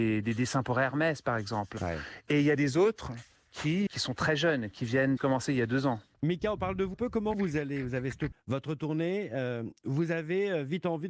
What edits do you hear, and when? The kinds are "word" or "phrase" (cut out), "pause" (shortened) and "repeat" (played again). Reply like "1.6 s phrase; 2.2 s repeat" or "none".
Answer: 3.9 s word; 5.2 s word; 6.9 s word; 7.3 s word; 8.3 s word

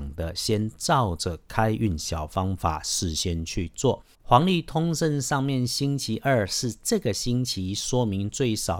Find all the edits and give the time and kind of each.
4.1 s pause

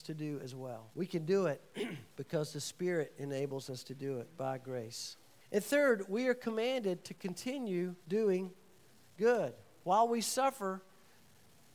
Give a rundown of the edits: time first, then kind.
0.9 s pause; 2.1 s pause; 5.4 s pause; 8.0 s pause

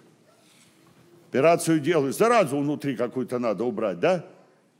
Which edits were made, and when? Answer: none

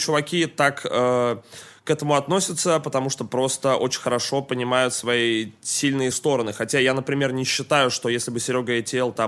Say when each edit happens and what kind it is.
6.1 s word

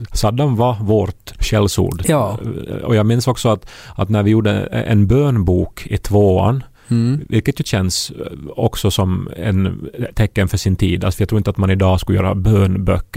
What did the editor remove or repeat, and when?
none

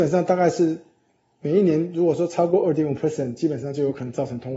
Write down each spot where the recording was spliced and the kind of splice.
none

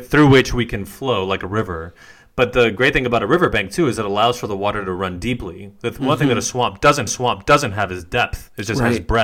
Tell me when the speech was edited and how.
7.1 s repeat

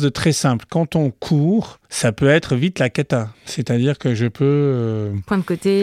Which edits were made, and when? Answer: 1.9 s pause; 3.3 s pause

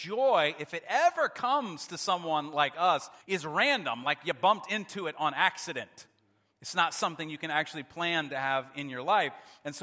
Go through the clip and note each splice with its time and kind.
3.2 s pause

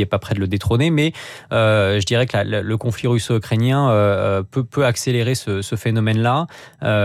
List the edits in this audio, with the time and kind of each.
none

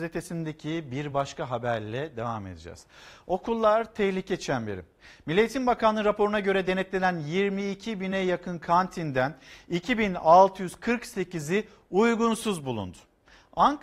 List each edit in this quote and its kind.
none

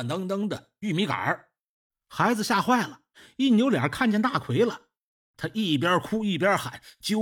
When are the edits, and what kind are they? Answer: none

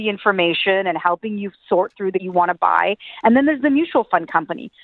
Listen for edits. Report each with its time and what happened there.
2.2 s phrase

